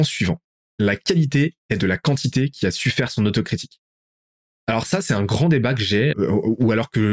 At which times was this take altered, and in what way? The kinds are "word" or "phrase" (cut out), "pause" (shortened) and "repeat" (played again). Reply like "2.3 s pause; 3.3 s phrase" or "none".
6.1 s word